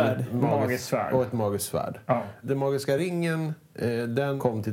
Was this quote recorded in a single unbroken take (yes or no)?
yes